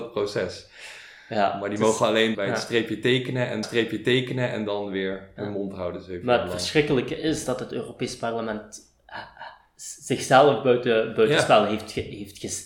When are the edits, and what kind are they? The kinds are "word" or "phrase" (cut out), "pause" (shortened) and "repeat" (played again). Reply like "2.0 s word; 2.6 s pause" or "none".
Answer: 2.3 s word; 3.6 s repeat